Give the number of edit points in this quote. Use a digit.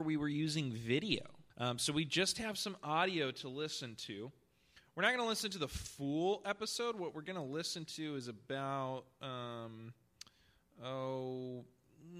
1